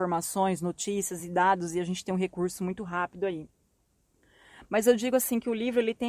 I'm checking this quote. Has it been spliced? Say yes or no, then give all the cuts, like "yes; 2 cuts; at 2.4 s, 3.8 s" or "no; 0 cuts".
no; 0 cuts